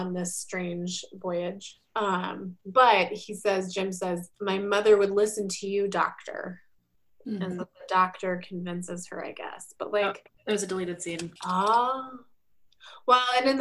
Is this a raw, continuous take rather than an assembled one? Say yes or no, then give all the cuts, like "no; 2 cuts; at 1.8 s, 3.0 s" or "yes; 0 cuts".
no; 4 cuts; at 2.6 s, 4.3 s, 6.8 s, 11.4 s